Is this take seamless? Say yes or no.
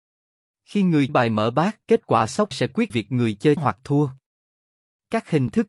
no